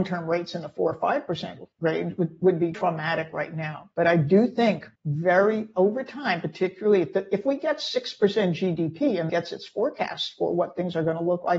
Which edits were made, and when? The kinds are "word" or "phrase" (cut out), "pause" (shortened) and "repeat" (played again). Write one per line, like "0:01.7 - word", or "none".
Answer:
0:01.7 - pause
0:02.7 - word
0:03.9 - pause
0:05.0 - pause
0:09.3 - phrase